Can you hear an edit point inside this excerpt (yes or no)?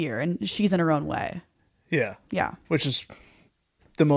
no